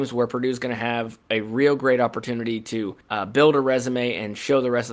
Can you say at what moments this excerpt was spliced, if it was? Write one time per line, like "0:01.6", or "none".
0:03.0